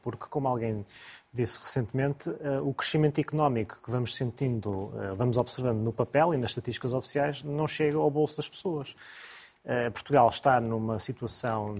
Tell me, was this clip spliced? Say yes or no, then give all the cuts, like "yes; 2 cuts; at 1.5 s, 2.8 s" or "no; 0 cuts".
no; 0 cuts